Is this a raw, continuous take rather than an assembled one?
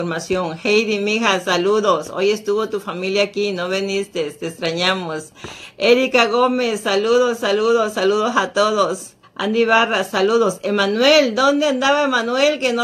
no; 1 cut; at 9.2 s

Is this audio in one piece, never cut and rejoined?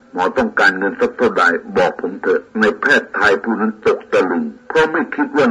no; 2 cuts; at 2.5 s, 4.6 s

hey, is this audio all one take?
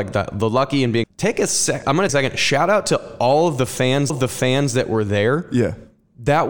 no; 3 cuts; at 1.0 s, 2.1 s, 4.1 s

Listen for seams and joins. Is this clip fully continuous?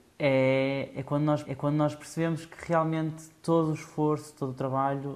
no; 1 cut; at 1.4 s

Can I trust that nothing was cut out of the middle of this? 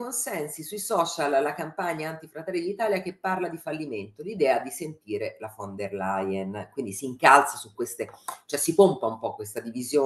yes; 0 cuts

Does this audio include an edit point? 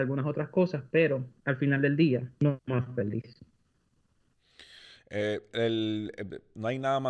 yes; 1 cut; at 1.4 s

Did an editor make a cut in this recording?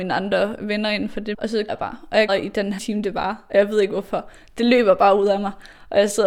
yes; 4 cuts; at 1.3 s, 1.7 s, 2.3 s, 2.8 s

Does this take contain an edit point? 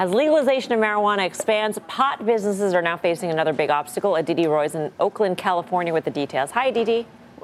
no; 0 cuts

